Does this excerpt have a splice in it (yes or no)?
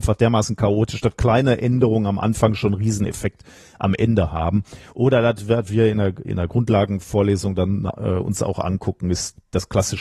no